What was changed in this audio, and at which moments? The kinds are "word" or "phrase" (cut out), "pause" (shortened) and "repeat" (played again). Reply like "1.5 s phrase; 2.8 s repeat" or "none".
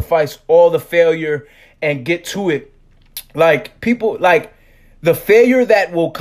none